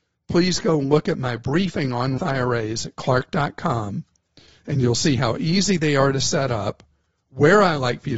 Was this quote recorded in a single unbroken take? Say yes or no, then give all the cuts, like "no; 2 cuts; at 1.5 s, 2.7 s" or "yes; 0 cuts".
no; 1 cut; at 2.2 s